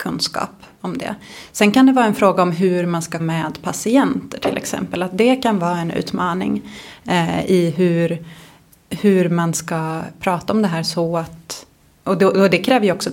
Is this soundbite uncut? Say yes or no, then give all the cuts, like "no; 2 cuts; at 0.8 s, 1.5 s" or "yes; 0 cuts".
no; 1 cut; at 3.2 s